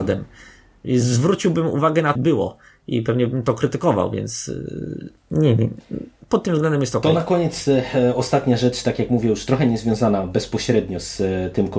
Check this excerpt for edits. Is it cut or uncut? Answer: cut